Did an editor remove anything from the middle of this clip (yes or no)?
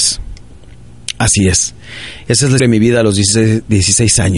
yes